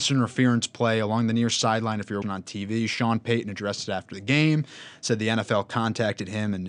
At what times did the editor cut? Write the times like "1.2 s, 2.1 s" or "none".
2.2 s